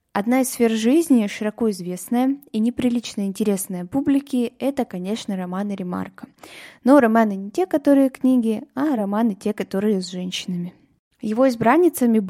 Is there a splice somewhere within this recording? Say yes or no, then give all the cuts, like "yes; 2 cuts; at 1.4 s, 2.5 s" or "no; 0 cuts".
no; 0 cuts